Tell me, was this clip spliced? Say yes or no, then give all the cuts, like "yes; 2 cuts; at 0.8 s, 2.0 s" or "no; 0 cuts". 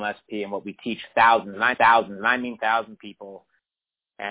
yes; 2 cuts; at 1.7 s, 3.0 s